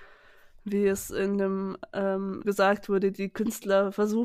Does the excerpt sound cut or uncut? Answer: cut